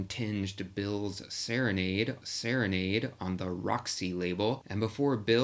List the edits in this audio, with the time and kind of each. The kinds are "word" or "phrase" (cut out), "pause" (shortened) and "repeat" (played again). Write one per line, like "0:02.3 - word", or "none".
0:02.2 - repeat